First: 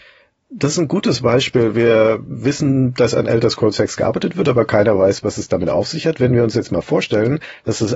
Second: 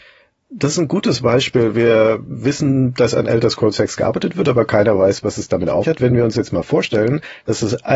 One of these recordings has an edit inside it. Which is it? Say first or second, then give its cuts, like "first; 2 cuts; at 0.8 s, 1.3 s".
second; 1 cut; at 5.8 s